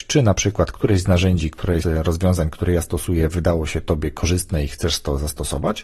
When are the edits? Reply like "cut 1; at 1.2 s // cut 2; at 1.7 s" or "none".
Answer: cut 1; at 1.8 s